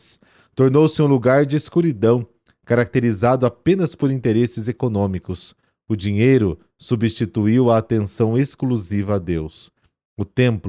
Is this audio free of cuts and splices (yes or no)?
yes